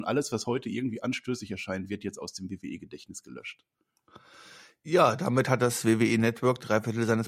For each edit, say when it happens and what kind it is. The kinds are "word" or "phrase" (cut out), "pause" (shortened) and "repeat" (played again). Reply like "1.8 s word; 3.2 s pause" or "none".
none